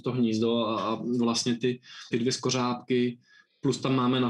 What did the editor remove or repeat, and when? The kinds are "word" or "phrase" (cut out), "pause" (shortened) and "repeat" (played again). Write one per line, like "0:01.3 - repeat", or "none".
0:02.1 - word